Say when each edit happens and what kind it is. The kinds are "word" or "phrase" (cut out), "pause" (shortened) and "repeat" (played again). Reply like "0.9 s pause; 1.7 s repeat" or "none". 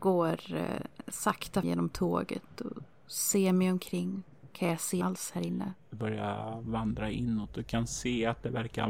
1.6 s word; 5.0 s word